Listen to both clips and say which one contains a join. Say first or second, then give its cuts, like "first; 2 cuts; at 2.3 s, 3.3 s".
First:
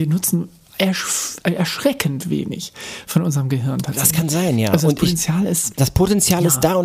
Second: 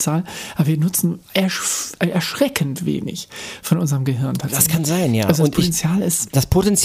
second; 1 cut; at 1.2 s